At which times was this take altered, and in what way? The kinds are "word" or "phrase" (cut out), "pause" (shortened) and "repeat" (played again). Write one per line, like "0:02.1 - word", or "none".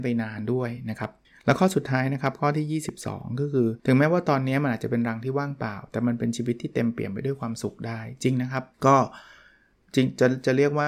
0:01.2 - pause
0:03.8 - pause
0:08.7 - pause